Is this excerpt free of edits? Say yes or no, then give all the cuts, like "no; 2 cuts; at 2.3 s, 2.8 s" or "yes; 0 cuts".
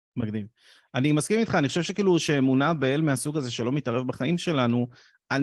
yes; 0 cuts